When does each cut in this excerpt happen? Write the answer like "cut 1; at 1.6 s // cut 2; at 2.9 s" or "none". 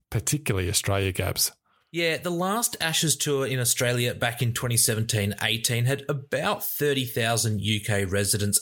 none